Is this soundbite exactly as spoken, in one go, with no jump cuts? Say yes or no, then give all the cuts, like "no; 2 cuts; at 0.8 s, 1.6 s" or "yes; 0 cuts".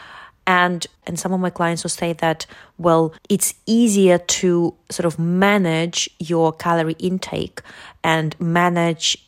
no; 3 cuts; at 1.0 s, 1.8 s, 3.2 s